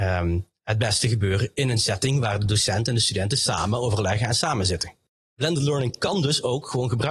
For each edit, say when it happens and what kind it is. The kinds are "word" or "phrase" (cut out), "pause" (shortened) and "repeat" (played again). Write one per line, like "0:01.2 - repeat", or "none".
0:05.1 - pause